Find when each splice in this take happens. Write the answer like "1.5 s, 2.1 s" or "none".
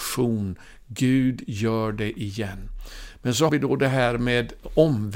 3.5 s